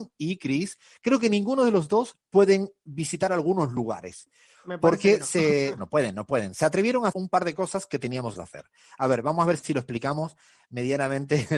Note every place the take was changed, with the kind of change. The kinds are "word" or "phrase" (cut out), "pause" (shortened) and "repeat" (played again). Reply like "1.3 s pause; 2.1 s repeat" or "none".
5.8 s word; 7.1 s word; 8.3 s word